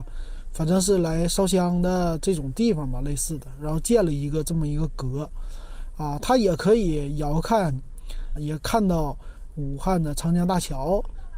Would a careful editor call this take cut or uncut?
cut